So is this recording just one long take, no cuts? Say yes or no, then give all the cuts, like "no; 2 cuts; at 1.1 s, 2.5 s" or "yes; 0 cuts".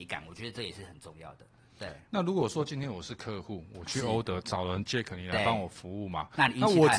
yes; 0 cuts